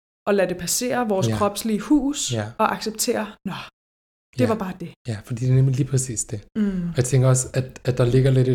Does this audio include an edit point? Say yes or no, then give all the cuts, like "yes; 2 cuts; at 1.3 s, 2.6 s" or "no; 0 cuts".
no; 0 cuts